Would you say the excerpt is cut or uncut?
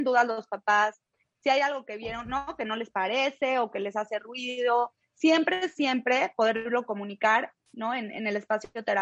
uncut